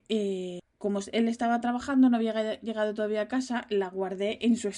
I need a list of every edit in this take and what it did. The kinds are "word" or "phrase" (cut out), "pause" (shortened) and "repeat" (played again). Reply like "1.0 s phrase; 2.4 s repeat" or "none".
none